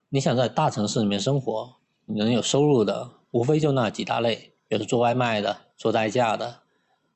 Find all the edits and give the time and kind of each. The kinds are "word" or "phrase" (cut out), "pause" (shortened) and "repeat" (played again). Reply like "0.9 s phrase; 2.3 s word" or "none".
2.1 s word; 4.6 s pause; 5.7 s pause